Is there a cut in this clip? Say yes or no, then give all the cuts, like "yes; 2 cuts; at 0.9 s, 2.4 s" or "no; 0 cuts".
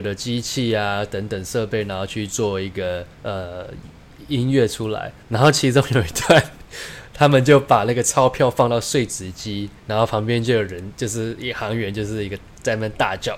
yes; 3 cuts; at 3.1 s, 5.2 s, 9.8 s